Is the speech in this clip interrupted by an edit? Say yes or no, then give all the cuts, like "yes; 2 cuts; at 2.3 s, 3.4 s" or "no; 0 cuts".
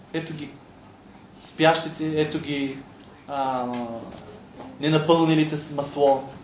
no; 0 cuts